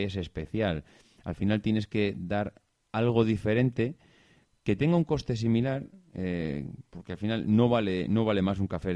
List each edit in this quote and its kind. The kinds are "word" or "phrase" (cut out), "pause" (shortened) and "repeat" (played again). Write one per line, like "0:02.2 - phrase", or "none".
none